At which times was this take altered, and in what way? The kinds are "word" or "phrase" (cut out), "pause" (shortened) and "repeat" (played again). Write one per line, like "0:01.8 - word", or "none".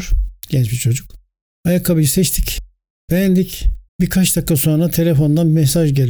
0:03.9 - pause